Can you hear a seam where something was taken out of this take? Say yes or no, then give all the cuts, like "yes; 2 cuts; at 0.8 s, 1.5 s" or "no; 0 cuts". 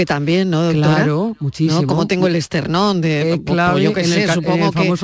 no; 0 cuts